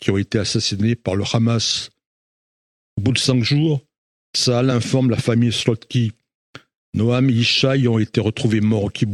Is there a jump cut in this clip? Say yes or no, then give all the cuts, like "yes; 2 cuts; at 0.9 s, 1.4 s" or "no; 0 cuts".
no; 0 cuts